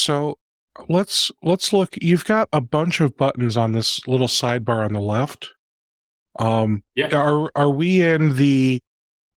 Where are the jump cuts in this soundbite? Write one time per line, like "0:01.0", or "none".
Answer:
0:06.9